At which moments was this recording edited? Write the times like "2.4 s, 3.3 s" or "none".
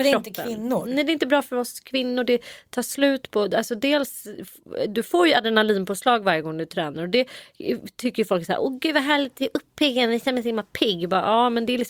none